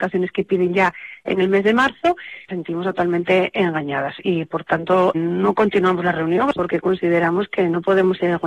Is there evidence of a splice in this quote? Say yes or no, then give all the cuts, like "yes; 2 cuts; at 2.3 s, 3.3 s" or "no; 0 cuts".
yes; 2 cuts; at 2.5 s, 5.1 s